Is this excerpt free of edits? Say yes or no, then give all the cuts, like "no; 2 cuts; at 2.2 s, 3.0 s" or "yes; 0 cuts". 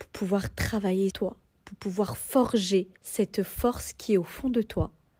no; 2 cuts; at 1.1 s, 3.0 s